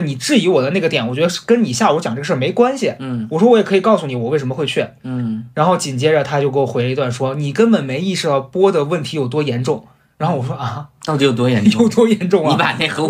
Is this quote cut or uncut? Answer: uncut